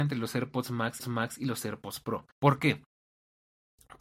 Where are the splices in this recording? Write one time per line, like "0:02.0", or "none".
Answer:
0:01.0
0:02.3

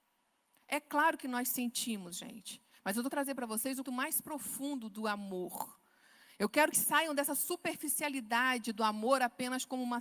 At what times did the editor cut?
0:03.1
0:03.8
0:06.7

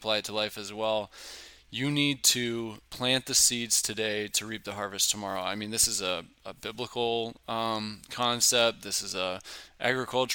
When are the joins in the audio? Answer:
none

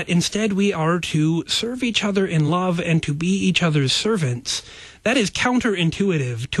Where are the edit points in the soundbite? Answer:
none

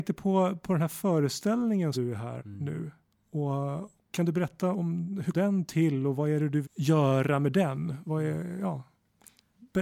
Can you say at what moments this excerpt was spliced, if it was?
0:01.9
0:02.4
0:04.0
0:04.7
0:05.3
0:06.6

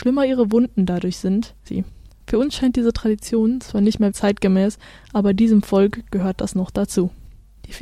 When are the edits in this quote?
0:01.6
0:04.1

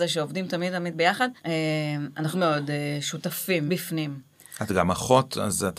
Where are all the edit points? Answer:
0:01.4
0:02.3
0:03.7

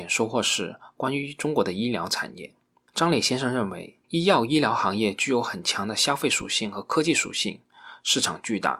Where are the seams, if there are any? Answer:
0:04.0

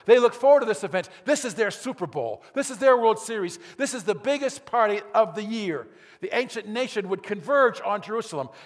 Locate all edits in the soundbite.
none

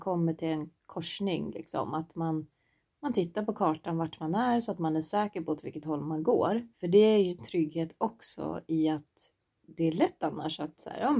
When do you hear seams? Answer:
0:06.7

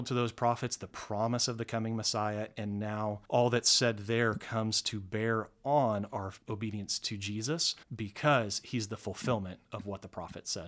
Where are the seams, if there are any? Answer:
0:03.2
0:06.4
0:07.8

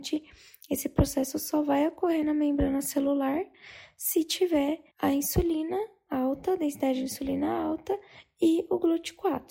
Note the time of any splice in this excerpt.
0:04.9

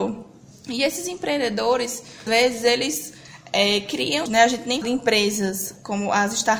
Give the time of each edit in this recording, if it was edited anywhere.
0:02.3
0:04.3
0:04.8

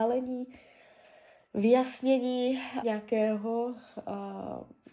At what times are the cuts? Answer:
0:02.8

